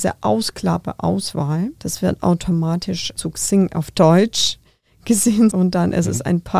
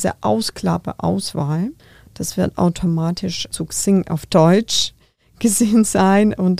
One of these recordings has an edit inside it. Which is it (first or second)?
first